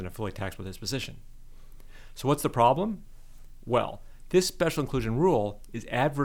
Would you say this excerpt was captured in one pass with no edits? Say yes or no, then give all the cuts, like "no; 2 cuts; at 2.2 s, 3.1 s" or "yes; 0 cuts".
yes; 0 cuts